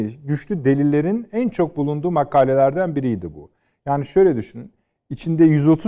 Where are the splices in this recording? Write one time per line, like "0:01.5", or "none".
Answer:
none

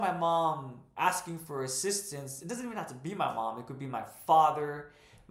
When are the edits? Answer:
none

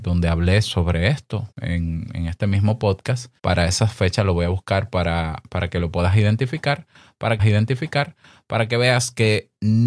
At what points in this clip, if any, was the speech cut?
0:01.5
0:03.4
0:07.4

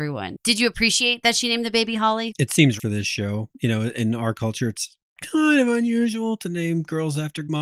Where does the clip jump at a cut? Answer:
0:02.8

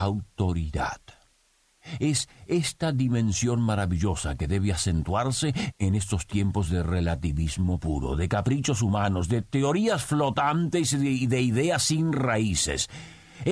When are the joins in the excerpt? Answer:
0:05.7

